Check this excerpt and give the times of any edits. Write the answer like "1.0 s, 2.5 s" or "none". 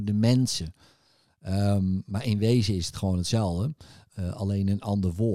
none